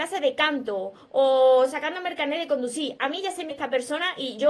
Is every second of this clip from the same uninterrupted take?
no; 1 cut; at 3.5 s

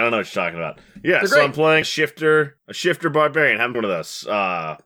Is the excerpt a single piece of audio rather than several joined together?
no; 3 cuts; at 1.8 s, 2.6 s, 3.7 s

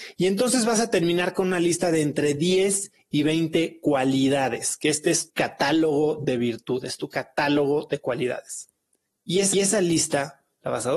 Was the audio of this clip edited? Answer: yes; 2 cuts; at 5.3 s, 9.5 s

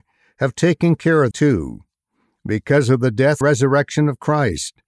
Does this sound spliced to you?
yes; 2 cuts; at 1.3 s, 3.4 s

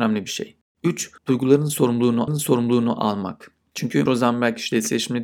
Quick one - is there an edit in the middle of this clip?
yes; 3 cuts; at 1.2 s, 2.3 s, 4.1 s

